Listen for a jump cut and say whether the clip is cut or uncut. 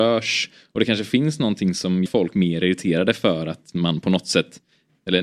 cut